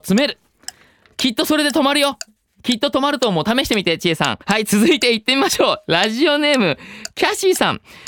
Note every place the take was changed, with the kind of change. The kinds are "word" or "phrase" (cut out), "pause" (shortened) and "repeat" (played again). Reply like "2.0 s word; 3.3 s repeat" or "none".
4.4 s pause